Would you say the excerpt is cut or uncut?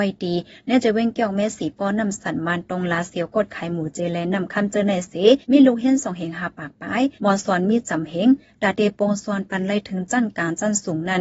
cut